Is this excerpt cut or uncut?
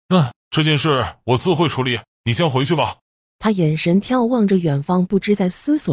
uncut